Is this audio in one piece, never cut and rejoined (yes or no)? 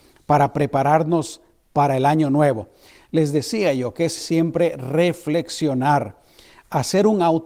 no